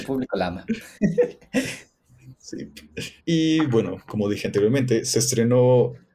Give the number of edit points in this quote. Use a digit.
1